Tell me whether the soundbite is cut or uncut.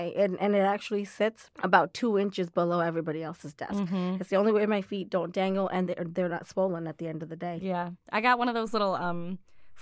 cut